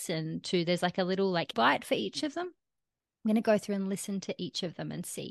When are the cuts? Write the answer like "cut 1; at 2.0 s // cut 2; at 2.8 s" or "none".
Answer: cut 1; at 1.5 s

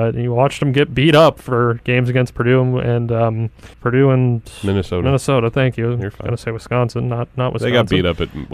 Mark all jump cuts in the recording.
cut 1; at 3.7 s

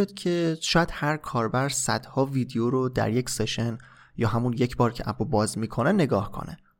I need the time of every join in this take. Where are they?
none

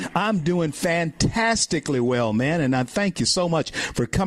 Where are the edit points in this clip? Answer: none

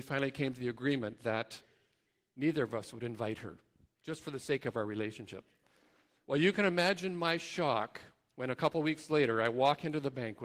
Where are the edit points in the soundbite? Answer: none

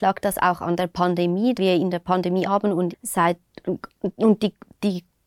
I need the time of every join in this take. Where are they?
cut 1; at 1.6 s // cut 2; at 2.4 s // cut 3; at 2.9 s

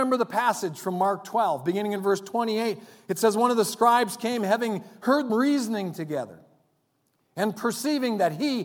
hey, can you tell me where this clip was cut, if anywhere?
cut 1; at 5.3 s

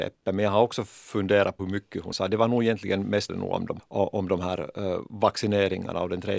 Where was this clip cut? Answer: cut 1; at 1.6 s // cut 2; at 2.1 s // cut 3; at 3.3 s // cut 4; at 3.8 s

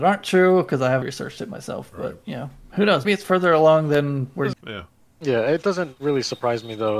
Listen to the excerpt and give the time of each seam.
cut 1; at 1.0 s // cut 2; at 3.0 s // cut 3; at 4.5 s // cut 4; at 6.0 s

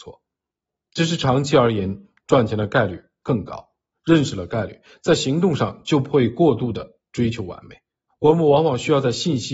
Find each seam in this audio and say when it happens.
cut 1; at 3.9 s // cut 2; at 8.1 s

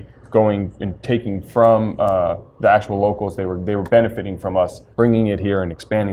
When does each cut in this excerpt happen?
cut 1; at 4.9 s

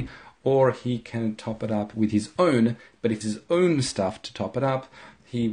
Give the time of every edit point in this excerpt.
cut 1; at 3.2 s

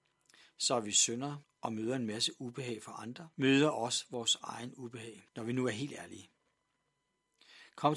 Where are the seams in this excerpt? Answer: cut 1; at 1.4 s // cut 2; at 3.3 s // cut 3; at 5.3 s

